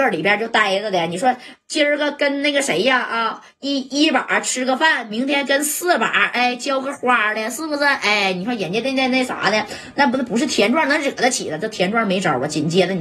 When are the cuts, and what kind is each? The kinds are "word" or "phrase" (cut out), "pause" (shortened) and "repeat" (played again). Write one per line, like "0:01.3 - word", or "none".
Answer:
none